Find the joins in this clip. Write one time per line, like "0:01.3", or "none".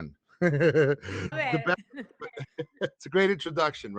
0:01.3
0:03.0